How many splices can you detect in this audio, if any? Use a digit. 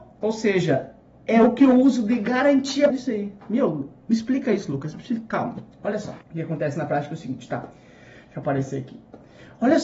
3